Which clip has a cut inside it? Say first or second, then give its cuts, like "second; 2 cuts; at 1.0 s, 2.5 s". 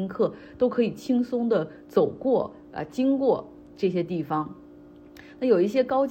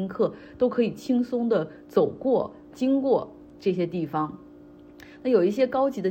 second; 1 cut; at 2.7 s